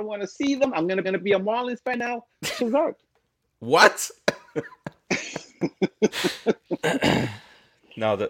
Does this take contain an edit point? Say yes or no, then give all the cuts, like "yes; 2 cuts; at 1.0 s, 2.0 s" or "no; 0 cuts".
yes; 2 cuts; at 1.0 s, 2.6 s